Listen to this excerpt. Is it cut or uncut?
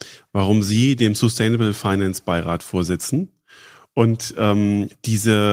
uncut